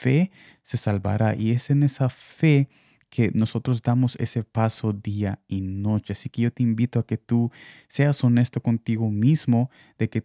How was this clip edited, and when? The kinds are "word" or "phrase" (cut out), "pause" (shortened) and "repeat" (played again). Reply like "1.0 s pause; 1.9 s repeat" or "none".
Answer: none